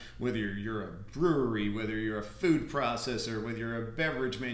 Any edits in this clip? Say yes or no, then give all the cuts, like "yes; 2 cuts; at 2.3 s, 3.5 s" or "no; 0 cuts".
no; 0 cuts